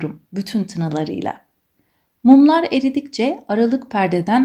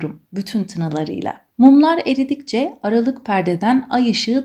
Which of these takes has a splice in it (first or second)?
second